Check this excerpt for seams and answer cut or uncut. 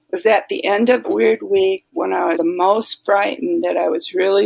cut